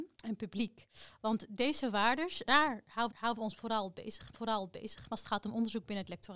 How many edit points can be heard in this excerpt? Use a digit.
3